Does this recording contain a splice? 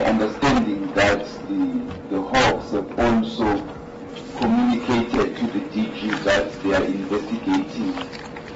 no; 0 cuts

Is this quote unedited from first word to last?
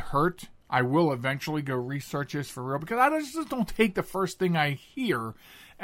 yes; 0 cuts

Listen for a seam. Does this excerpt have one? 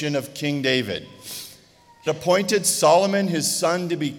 yes; 1 cut; at 2.1 s

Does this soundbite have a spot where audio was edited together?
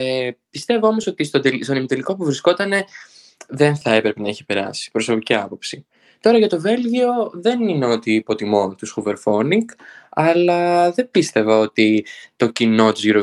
no; 0 cuts

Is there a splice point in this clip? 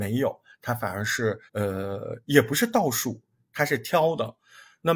yes; 1 cut; at 1.5 s

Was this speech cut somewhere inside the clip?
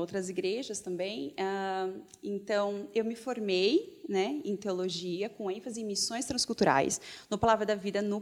no; 0 cuts

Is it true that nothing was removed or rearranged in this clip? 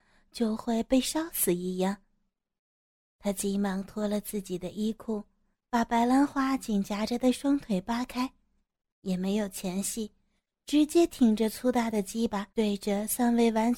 no; 1 cut; at 12.5 s

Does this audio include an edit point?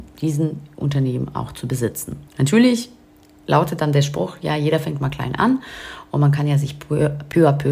yes; 1 cut; at 2.3 s

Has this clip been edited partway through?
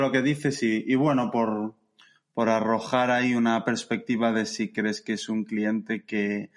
no; 0 cuts

